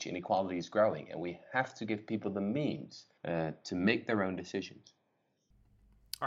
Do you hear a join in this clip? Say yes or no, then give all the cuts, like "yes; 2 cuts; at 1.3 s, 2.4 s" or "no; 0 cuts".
no; 0 cuts